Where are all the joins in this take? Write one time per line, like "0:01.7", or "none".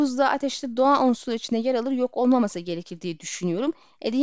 none